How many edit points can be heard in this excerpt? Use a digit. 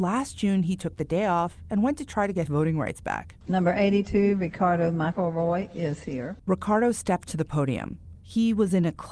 2